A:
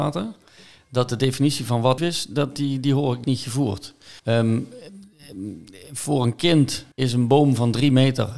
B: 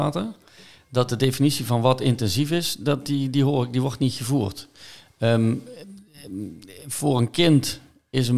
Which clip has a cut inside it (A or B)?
A